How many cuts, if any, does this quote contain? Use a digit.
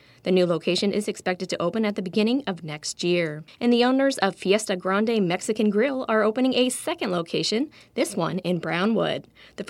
1